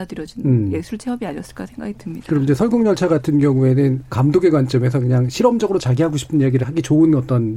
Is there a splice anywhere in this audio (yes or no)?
yes